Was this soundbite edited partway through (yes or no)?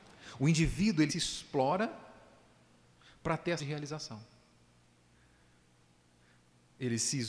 yes